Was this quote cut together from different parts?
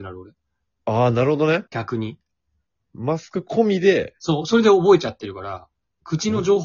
yes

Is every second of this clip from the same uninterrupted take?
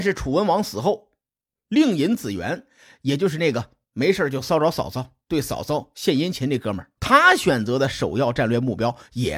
no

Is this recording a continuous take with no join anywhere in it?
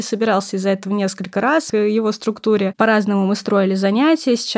no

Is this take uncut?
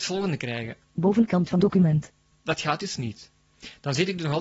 no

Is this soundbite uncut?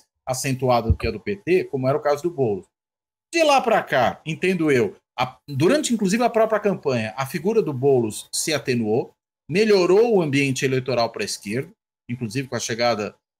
yes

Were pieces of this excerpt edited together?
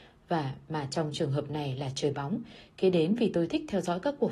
no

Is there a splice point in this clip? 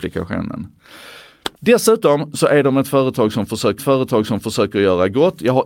yes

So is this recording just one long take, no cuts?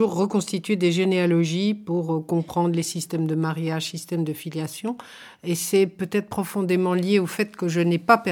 yes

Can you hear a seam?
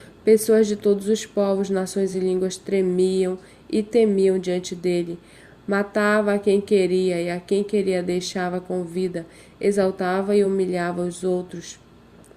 no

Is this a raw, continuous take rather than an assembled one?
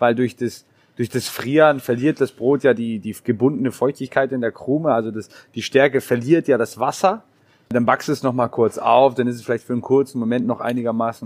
yes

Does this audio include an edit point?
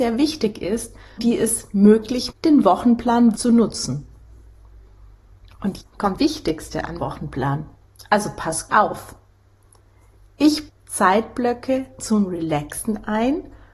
yes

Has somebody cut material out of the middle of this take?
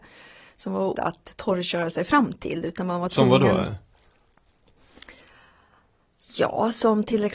yes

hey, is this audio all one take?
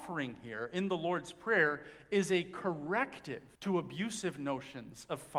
no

